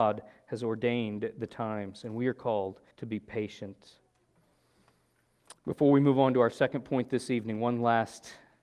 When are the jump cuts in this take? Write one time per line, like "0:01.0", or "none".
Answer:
0:02.9